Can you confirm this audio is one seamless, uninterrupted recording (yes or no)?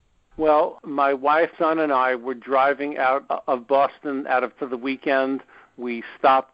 no